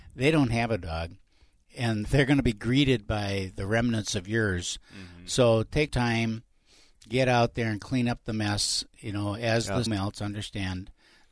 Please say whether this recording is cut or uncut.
cut